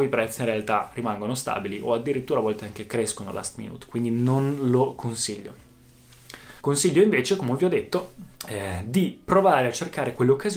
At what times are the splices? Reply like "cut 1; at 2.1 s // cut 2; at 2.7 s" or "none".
cut 1; at 6.6 s // cut 2; at 8.3 s